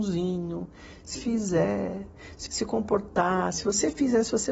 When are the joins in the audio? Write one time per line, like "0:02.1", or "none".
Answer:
0:01.2
0:02.5